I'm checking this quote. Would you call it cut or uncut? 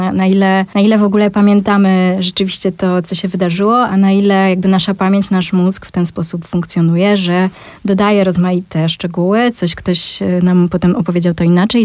uncut